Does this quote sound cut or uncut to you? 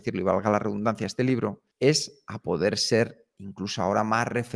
cut